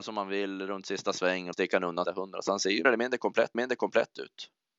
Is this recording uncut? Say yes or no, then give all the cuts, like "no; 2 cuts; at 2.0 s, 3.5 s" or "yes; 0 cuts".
no; 4 cuts; at 1.5 s, 2.0 s, 2.8 s, 3.5 s